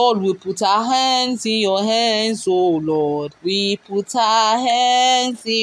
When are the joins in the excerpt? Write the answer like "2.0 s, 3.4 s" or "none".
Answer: 3.4 s